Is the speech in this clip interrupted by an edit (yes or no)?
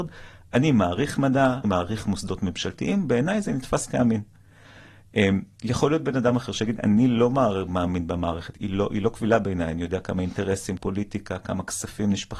yes